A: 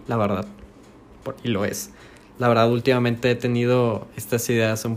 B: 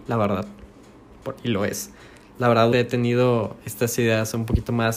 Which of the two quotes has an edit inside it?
B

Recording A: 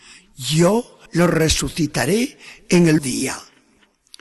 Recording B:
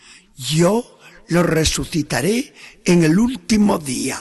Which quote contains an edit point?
A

